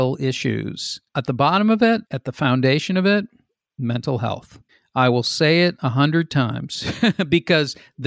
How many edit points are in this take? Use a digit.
3